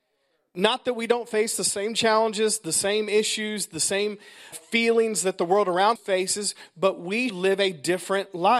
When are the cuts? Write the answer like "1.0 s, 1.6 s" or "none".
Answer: 4.5 s, 6.0 s, 7.3 s